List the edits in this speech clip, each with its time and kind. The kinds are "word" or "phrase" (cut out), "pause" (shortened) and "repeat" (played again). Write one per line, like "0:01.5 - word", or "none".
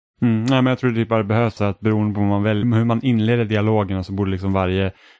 0:01.6 - word
0:02.6 - word

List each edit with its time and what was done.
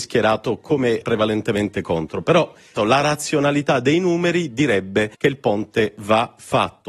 0:01.0 - word
0:02.8 - word
0:05.1 - pause

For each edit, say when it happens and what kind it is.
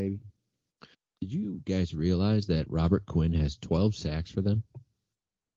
0:00.9 - pause

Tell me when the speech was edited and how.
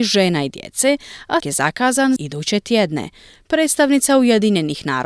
0:01.4 - word
0:02.2 - word

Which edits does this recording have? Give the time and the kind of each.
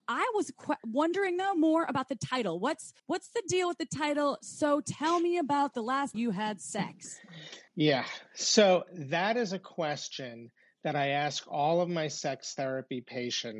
0:03.0 - pause
0:06.1 - word
0:07.7 - pause

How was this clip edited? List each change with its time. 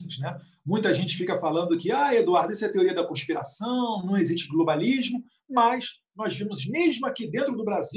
none

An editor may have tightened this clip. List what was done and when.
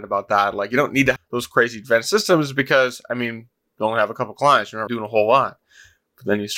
0:01.2 - word
0:04.9 - word

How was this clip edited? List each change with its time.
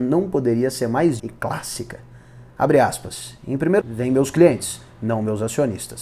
0:01.2 - word
0:03.8 - word

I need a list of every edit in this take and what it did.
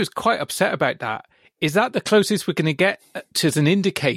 none

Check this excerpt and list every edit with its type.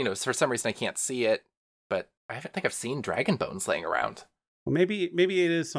0:02.2 - pause
0:02.5 - word

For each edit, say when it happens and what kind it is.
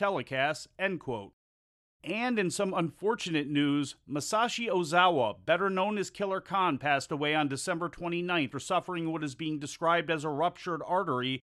0:08.5 - word

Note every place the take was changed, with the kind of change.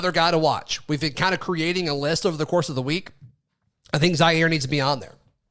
none

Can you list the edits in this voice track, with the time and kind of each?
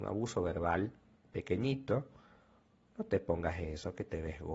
none

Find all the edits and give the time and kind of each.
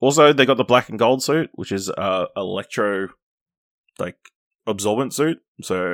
none

